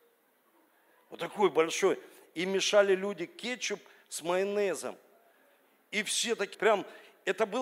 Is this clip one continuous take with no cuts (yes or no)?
no